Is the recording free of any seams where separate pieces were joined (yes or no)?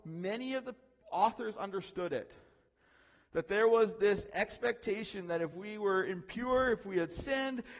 yes